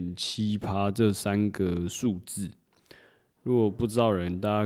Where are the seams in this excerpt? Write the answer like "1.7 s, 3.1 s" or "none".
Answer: none